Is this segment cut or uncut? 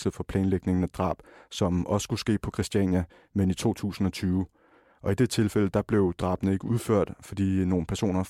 uncut